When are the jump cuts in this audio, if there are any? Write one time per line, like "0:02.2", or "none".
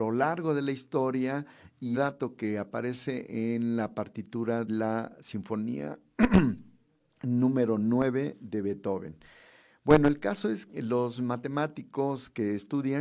0:01.9
0:04.7
0:10.7